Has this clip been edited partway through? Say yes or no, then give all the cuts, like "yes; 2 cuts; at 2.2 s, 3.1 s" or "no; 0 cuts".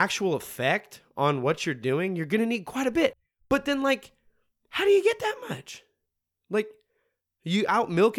no; 0 cuts